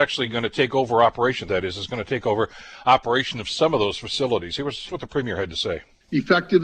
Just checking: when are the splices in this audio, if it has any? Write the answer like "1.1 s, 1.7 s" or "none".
1.5 s, 4.9 s